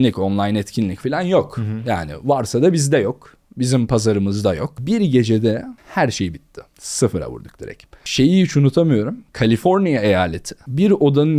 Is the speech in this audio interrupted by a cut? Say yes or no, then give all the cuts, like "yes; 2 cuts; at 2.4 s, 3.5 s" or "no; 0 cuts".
yes; 1 cut; at 1.0 s